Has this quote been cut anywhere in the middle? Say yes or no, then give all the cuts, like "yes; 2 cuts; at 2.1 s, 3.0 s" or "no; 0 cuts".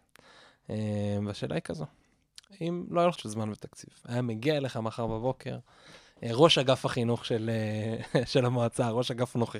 yes; 1 cut; at 3.2 s